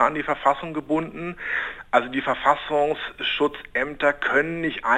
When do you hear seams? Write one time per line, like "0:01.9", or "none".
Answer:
none